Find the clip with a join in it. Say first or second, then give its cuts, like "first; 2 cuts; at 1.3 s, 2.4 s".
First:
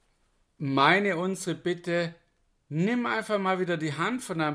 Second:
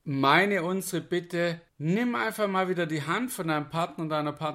second; 1 cut; at 1.7 s